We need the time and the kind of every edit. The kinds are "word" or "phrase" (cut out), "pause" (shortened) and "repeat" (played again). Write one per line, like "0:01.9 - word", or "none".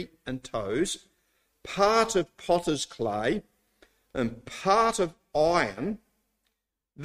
none